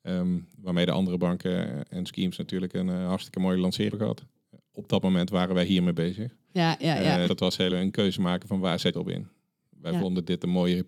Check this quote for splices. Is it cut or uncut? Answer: cut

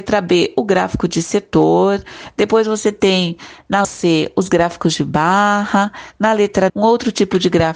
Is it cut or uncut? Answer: cut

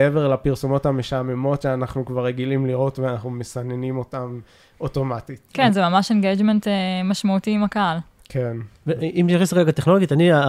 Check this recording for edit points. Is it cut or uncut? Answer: uncut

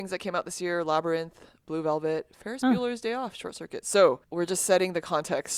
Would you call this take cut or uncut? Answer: cut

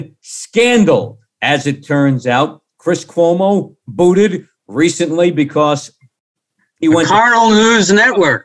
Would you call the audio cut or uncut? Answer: uncut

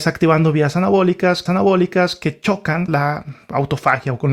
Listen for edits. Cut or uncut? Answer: cut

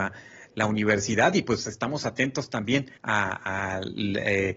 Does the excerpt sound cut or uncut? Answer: cut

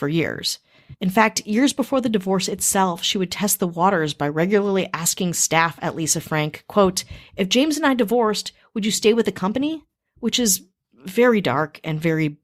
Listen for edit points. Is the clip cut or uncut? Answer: uncut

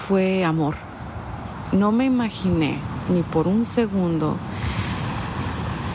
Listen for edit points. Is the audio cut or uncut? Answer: uncut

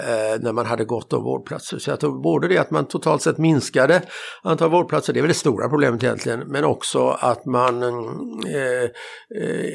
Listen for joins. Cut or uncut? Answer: uncut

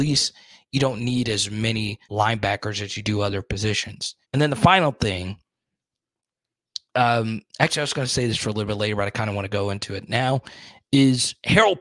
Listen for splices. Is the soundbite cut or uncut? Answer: cut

